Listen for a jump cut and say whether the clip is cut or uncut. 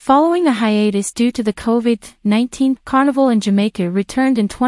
cut